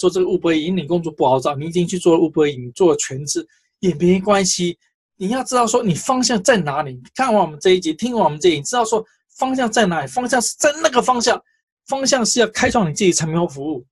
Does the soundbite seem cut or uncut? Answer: uncut